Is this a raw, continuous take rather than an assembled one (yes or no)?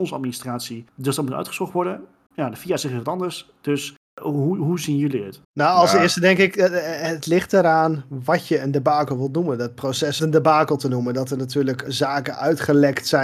no